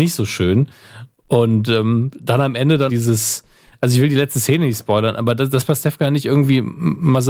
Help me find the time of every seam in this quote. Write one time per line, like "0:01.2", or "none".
0:02.9